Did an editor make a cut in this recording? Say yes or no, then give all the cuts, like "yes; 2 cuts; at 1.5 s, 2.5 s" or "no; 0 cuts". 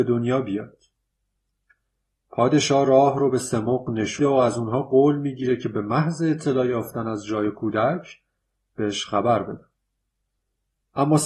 yes; 1 cut; at 4.2 s